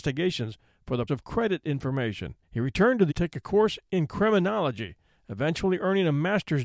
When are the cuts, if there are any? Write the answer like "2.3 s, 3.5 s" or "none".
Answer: 1.1 s, 2.4 s, 3.1 s